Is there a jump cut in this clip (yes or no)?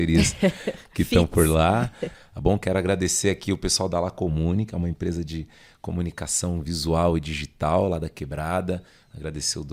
no